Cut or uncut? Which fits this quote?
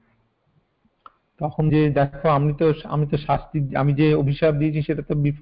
cut